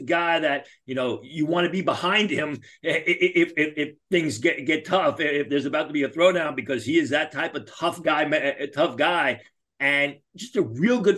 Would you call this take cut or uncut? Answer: uncut